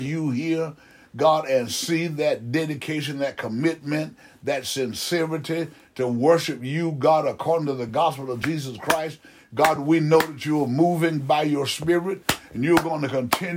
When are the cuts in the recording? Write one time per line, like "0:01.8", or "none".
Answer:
none